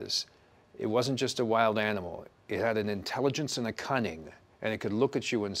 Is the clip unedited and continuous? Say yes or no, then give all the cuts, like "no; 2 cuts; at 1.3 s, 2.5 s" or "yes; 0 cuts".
yes; 0 cuts